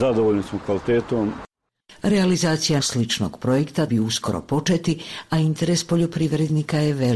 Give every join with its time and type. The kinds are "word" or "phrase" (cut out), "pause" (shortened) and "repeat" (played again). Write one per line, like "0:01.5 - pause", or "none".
0:02.8 - word
0:03.9 - word